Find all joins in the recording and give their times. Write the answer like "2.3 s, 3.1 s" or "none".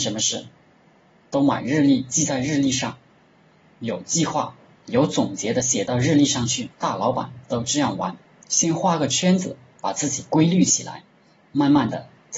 6.7 s, 8.2 s